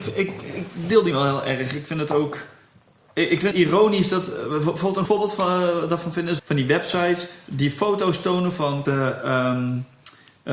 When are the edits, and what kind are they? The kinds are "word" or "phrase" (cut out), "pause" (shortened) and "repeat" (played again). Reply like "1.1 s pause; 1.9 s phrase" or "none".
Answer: 1.1 s word; 3.5 s word; 5.1 s word; 6.4 s word; 8.8 s word